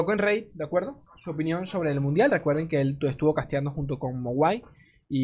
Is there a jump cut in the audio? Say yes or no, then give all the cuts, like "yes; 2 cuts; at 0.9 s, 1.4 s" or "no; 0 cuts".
yes; 1 cut; at 1.1 s